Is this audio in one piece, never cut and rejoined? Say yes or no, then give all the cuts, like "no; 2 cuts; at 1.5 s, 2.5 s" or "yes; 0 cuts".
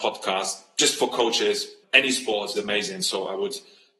no; 2 cuts; at 1.8 s, 2.6 s